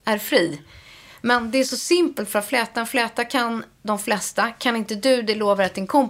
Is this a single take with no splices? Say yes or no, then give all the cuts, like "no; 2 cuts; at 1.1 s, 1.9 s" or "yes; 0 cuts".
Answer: yes; 0 cuts